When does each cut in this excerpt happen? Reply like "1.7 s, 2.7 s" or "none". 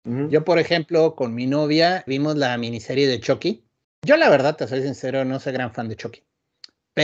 2.1 s, 3.8 s